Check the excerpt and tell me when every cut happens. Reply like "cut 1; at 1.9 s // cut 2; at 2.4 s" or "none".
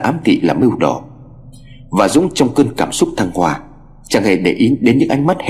none